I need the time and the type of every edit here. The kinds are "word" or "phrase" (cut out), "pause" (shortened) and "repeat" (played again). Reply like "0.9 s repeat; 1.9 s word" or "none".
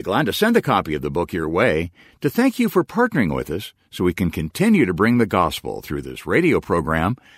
none